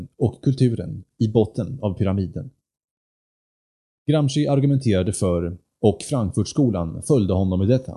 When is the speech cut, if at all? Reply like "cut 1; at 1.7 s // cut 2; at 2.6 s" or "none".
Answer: none